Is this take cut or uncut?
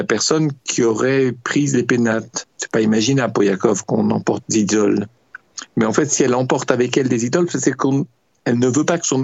cut